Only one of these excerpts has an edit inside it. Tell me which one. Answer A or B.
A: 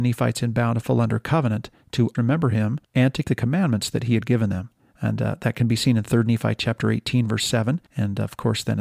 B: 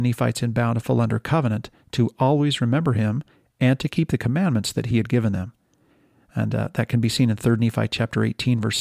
A